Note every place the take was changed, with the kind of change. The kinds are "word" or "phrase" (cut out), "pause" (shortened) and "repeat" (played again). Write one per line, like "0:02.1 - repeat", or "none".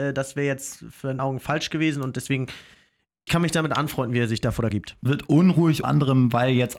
0:01.2 - word
0:03.3 - word
0:04.7 - word
0:05.1 - word
0:05.8 - word

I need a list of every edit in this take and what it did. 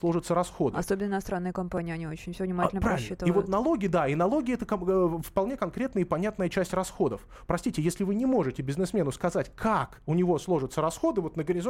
none

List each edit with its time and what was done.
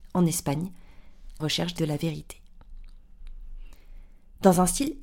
0:01.4 - phrase
0:01.8 - phrase

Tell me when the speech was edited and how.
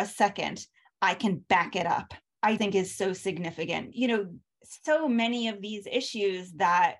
0:02.6 - word

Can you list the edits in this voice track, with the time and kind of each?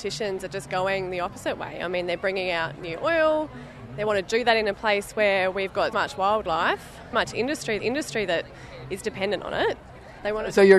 0:05.9 - word
0:07.1 - word
0:07.8 - repeat

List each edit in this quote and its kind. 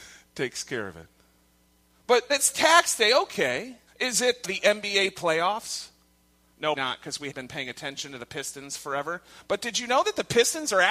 0:02.3 - word
0:03.9 - pause
0:04.4 - word
0:06.8 - word
0:07.3 - word

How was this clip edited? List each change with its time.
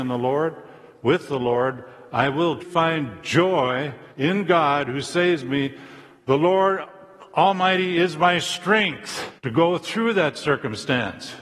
0:02.6 - word
0:04.1 - pause
0:09.4 - pause

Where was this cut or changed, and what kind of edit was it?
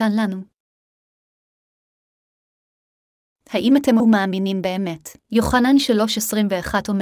0:04.0 - word
0:05.2 - pause

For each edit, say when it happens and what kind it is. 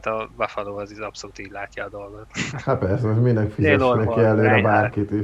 none

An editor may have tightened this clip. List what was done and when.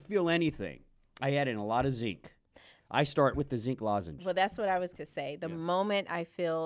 0:03.3 - word
0:04.9 - word

